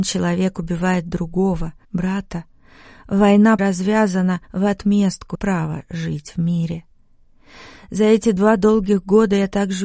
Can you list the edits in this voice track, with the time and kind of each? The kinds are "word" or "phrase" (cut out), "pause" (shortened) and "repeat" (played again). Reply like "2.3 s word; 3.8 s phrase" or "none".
1.8 s word; 3.6 s word; 4.4 s pause; 5.3 s phrase